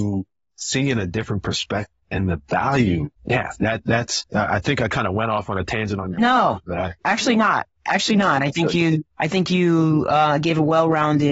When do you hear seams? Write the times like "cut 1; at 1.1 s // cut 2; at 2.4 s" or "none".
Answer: cut 1; at 2.0 s // cut 2; at 3.2 s // cut 3; at 7.0 s // cut 4; at 9.1 s